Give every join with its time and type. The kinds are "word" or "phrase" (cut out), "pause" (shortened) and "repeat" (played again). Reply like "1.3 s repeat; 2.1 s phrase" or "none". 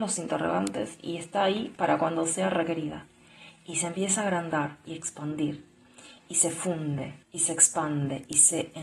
7.2 s pause